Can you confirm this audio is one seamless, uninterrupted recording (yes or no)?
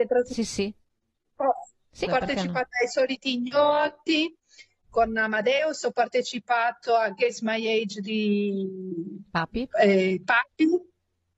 no